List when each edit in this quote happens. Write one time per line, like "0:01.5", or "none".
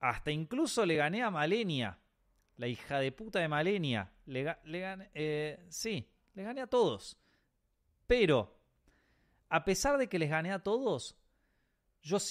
none